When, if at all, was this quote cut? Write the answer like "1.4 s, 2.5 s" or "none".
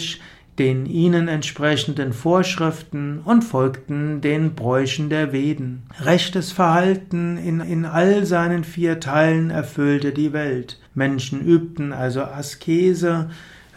5.9 s, 7.6 s, 10.9 s